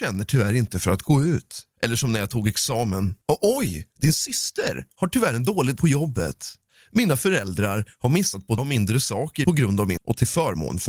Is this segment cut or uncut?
cut